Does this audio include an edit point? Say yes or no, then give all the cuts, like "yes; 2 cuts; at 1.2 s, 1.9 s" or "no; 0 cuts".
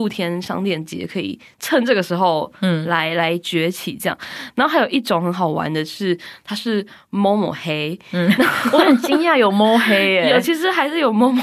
no; 0 cuts